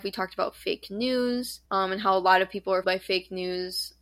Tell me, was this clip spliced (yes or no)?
yes